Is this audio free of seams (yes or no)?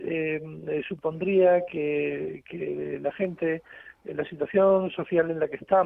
yes